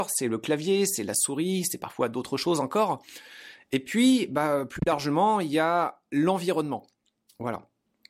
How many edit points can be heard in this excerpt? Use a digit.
0